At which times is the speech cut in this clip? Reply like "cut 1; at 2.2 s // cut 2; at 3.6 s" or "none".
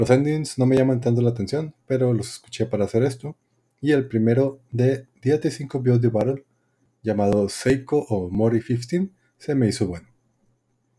none